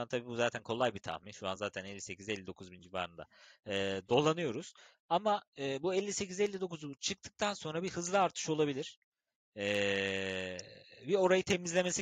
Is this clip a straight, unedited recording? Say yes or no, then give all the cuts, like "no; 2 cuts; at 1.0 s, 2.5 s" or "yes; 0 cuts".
yes; 0 cuts